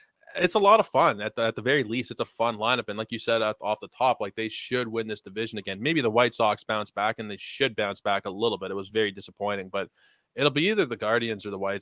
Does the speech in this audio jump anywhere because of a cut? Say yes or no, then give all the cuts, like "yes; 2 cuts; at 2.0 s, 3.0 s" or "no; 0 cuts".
no; 0 cuts